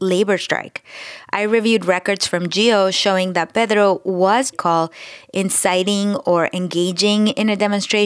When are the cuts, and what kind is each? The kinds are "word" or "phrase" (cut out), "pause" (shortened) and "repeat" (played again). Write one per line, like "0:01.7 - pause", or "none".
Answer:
0:04.5 - phrase